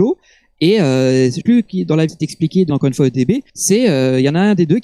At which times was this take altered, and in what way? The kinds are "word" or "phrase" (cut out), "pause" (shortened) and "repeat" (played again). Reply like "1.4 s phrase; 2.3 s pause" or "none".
1.4 s word; 2.1 s word; 2.7 s word; 3.5 s pause